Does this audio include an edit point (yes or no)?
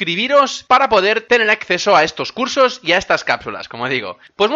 no